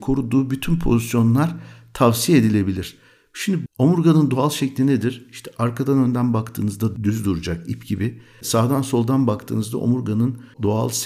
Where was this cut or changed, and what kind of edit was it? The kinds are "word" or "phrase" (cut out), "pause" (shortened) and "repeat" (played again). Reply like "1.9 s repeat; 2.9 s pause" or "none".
3.7 s word

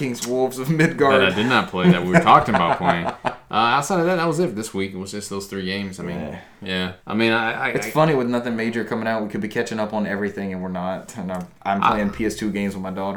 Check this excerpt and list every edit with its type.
7.0 s pause

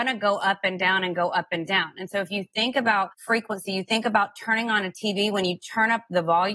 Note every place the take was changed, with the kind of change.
3.1 s pause

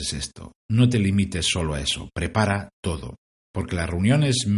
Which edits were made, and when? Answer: none

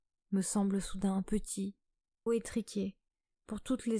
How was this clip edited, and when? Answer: 1.2 s word; 2.3 s word

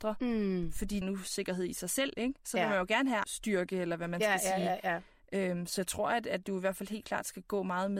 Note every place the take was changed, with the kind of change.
1.0 s phrase; 3.2 s word

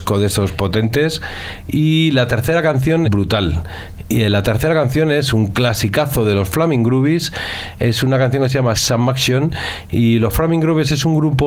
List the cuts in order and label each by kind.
3.0 s phrase; 8.7 s word

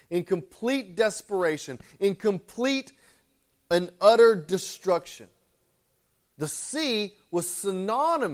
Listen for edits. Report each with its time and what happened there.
none

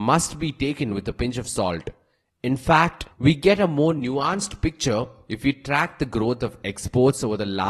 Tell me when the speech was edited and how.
3.1 s pause

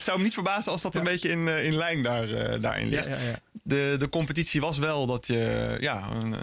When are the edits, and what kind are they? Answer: none

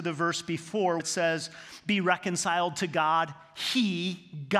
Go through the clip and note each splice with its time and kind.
1.0 s word

